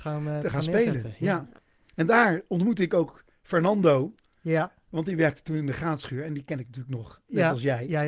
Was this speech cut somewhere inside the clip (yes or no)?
no